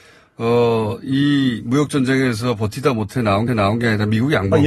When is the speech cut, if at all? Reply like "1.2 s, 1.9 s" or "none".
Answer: 3.5 s